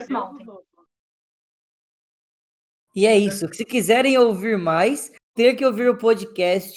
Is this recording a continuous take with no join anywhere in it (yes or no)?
no